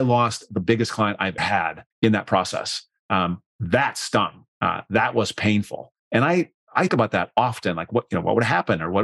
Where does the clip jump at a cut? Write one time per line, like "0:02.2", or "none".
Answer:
0:01.4
0:01.9
0:03.5
0:04.5
0:06.0
0:06.9